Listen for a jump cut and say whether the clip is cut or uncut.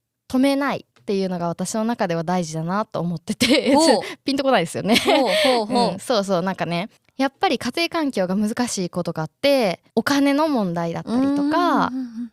cut